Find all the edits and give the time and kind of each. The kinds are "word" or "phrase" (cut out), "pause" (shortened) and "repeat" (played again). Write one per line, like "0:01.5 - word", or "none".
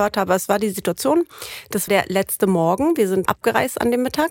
0:01.9 - word
0:03.3 - word